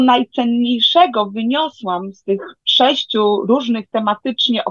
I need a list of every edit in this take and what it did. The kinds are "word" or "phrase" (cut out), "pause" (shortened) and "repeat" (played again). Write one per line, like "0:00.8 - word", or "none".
none